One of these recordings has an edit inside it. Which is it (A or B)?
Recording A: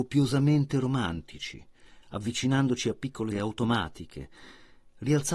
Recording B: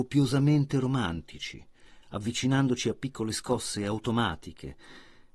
A